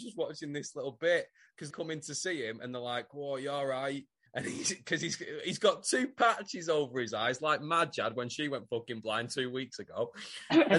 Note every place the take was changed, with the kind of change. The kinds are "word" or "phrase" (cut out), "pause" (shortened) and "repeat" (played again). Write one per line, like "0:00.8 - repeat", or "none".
0:01.7 - phrase
0:04.3 - pause